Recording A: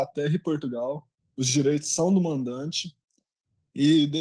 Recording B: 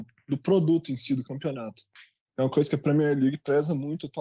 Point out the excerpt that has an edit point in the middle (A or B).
A